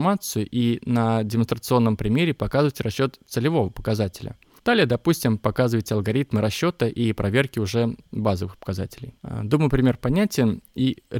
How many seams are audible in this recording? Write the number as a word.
two